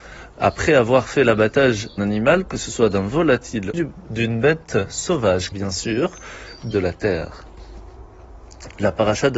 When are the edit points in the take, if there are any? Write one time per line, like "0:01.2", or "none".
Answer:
0:02.0
0:03.7
0:05.5
0:06.7